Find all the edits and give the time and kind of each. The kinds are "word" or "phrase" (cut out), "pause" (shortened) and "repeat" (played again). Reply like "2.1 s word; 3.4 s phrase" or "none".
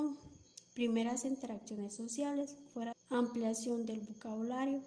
2.9 s phrase